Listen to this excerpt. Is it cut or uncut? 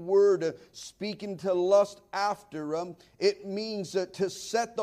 uncut